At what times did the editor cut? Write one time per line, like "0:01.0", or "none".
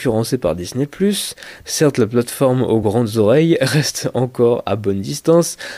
none